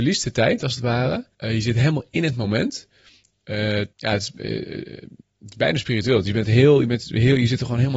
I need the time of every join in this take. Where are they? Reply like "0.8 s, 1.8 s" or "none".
1.3 s, 3.9 s, 5.2 s